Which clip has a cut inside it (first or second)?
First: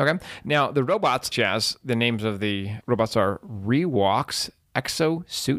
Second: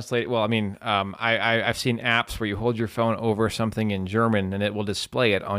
first